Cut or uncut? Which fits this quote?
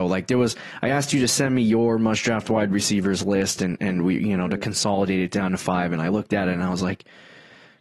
uncut